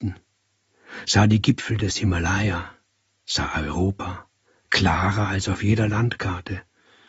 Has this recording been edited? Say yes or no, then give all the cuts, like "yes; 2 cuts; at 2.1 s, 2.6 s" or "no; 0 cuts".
no; 0 cuts